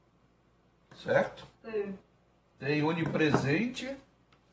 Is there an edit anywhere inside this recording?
yes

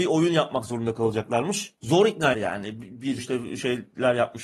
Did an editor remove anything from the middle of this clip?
yes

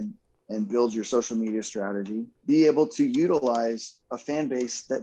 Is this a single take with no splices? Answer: no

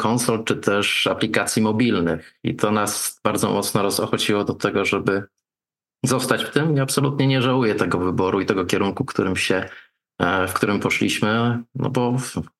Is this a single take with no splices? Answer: yes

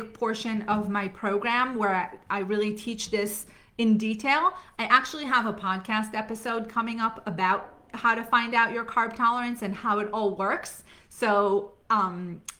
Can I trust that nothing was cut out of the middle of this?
yes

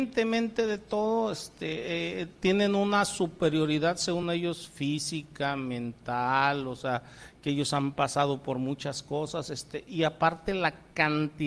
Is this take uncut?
yes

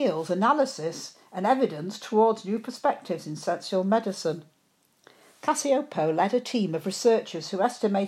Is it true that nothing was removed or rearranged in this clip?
yes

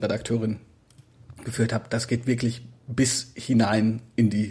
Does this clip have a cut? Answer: no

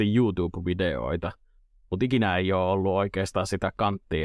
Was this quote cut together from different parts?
no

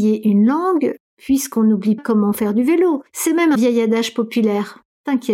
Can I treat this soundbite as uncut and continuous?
no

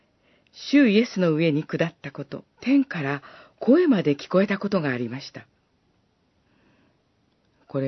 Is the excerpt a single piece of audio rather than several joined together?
no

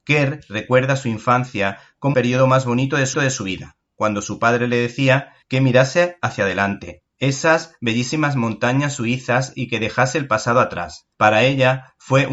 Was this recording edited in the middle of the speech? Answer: yes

